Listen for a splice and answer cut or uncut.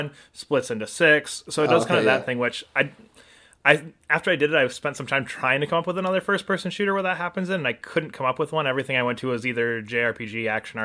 uncut